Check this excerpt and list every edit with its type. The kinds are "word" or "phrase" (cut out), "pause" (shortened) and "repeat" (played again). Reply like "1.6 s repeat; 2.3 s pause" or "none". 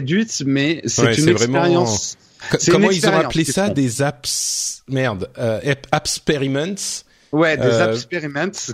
none